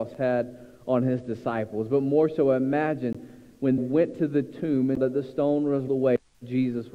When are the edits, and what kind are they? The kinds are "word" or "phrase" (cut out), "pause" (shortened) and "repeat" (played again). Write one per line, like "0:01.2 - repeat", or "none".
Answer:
0:03.8 - word
0:05.0 - word
0:05.9 - word